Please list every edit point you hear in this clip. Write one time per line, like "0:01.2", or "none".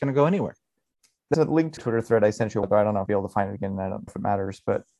0:01.3
0:01.8
0:02.6
0:03.1
0:04.1